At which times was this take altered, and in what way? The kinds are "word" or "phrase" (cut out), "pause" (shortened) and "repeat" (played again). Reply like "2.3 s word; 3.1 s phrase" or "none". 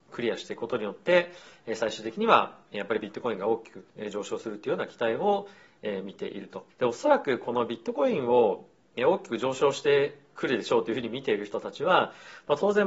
6.7 s pause

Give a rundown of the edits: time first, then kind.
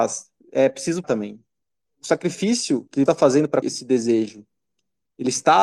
1.0 s word; 1.6 s pause; 3.1 s word; 3.6 s word

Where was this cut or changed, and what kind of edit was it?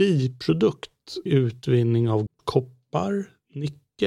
1.3 s word; 2.3 s word

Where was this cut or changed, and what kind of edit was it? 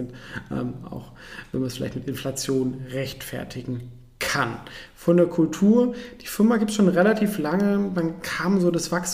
none

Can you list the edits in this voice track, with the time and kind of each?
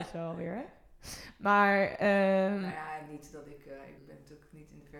4.0 s word

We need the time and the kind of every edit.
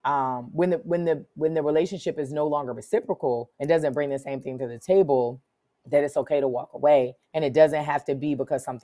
3.5 s pause; 5.6 s pause; 7.2 s pause

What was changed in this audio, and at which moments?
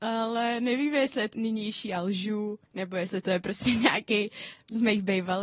1.3 s word; 2.6 s pause

